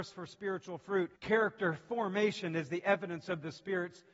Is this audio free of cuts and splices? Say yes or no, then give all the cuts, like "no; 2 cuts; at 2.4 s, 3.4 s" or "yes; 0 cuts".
no; 1 cut; at 1.2 s